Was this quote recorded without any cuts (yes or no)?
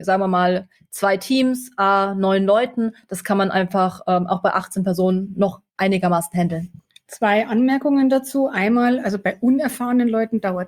yes